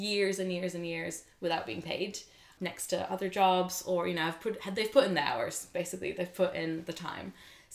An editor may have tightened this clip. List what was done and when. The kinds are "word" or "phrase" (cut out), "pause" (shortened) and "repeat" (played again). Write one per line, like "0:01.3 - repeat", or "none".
none